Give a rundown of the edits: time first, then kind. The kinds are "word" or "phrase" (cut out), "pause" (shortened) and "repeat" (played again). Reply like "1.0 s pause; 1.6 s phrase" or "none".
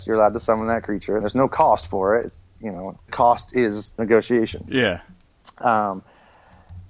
1.2 s word; 3.1 s word; 4.0 s word